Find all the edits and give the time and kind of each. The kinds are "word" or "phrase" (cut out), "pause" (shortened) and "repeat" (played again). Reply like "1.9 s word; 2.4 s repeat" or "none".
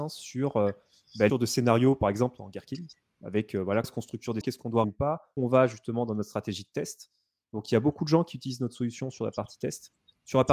1.3 s word; 3.8 s word; 4.4 s word; 4.8 s word; 5.4 s word

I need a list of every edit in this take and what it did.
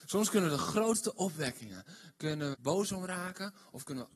2.5 s word

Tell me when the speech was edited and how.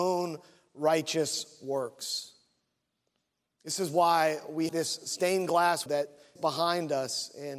4.7 s word; 5.9 s word; 6.4 s word

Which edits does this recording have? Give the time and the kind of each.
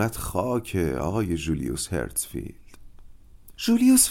none

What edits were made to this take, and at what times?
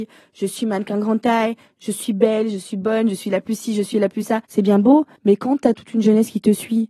4.4 s pause; 5.2 s pause

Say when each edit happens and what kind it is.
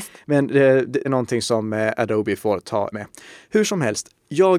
1.0 s word; 2.9 s word

